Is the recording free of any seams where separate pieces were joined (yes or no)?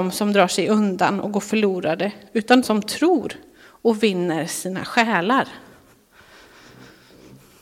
no